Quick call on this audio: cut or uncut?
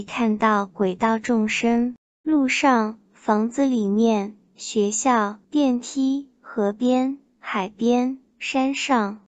cut